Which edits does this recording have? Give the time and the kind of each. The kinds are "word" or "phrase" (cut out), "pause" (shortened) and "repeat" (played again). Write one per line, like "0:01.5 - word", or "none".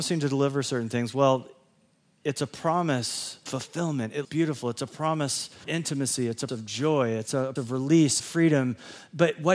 0:03.5 - word
0:04.2 - word
0:05.6 - word
0:06.5 - word
0:07.6 - word
0:08.2 - word